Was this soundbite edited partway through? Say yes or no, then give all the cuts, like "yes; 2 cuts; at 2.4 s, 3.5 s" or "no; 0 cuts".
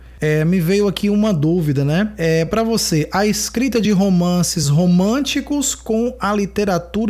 no; 0 cuts